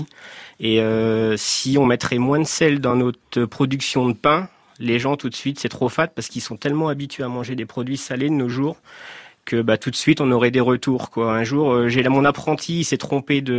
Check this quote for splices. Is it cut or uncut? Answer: uncut